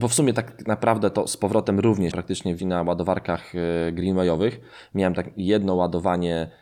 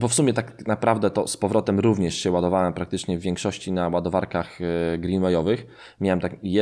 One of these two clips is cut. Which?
first; 2 cuts; at 2.1 s, 2.6 s

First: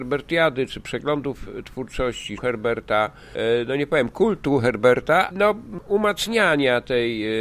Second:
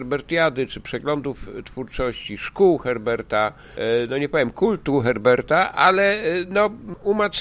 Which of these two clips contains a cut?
first; 2 cuts; at 2.4 s, 5.3 s

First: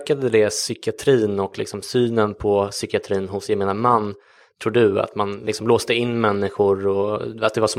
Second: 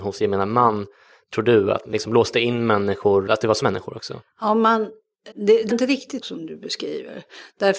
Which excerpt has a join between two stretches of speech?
second; 6 cuts; at 1.9 s, 3.3 s, 3.6 s, 5.3 s, 5.7 s, 6.2 s

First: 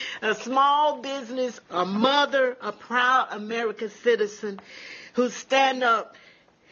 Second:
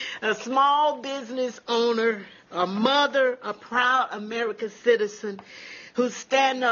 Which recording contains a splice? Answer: first; 1 cut; at 1.6 s

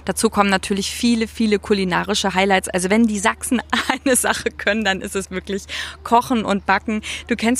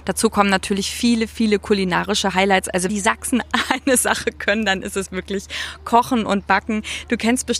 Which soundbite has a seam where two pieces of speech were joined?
second; 1 cut; at 2.9 s

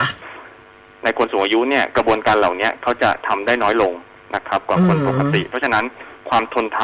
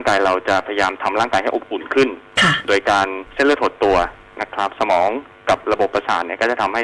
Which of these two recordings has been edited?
second; 1 cut; at 3.3 s

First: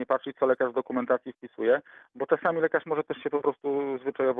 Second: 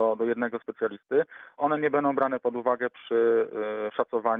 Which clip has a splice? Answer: second; 1 cut; at 1.6 s

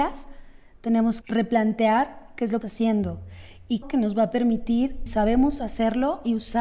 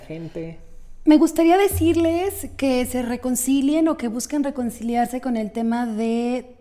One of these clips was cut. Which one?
first; 4 cuts; at 1.2 s, 2.6 s, 3.8 s, 5.1 s

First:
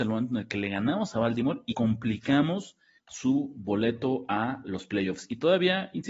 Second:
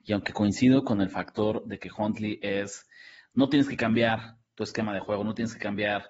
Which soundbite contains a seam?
first; 2 cuts; at 1.7 s, 3.0 s

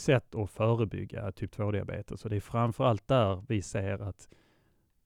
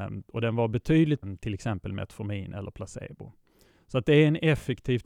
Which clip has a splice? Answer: second; 1 cut; at 1.2 s

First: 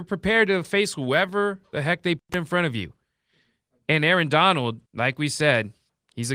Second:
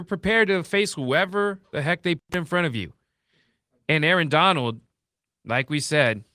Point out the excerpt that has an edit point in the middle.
first; 1 cut; at 4.9 s

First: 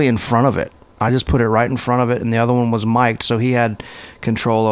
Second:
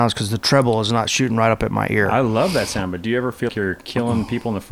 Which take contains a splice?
second; 1 cut; at 3.5 s

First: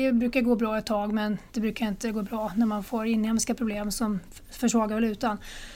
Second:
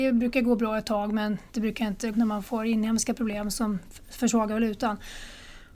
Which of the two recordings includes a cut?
second; 1 cut; at 2.1 s

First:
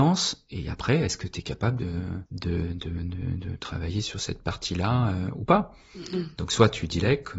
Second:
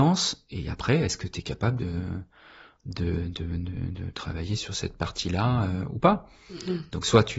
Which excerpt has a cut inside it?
first; 1 cut; at 2.3 s

